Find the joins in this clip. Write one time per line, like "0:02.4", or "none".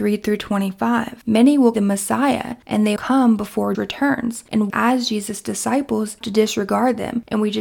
0:01.7
0:03.0
0:03.7
0:04.7
0:06.2